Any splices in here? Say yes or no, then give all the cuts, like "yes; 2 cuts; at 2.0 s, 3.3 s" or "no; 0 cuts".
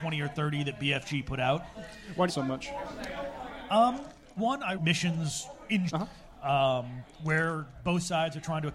yes; 4 cuts; at 2.3 s, 4.4 s, 4.8 s, 5.9 s